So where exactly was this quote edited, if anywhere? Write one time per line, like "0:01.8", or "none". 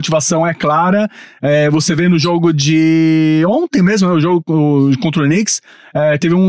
none

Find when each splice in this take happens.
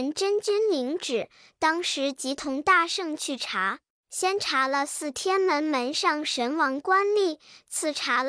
0:04.0

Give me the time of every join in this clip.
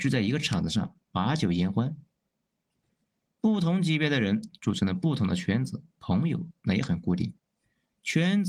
0:05.9

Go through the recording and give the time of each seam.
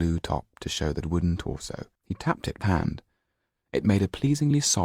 0:01.0
0:02.0
0:02.6

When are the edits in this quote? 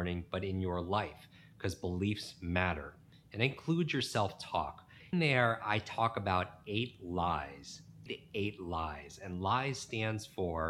0:05.1
0:08.1

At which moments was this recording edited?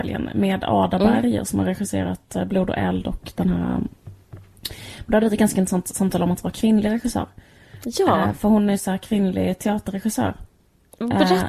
none

